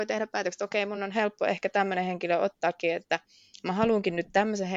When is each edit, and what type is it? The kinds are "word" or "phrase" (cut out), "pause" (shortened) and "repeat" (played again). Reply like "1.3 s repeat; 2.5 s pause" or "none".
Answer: none